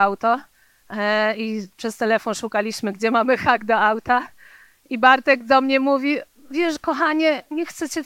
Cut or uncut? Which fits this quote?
uncut